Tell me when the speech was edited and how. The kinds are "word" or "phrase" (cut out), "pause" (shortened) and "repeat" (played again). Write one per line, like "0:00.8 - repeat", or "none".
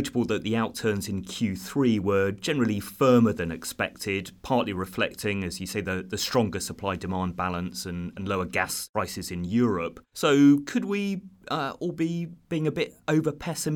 0:10.1 - pause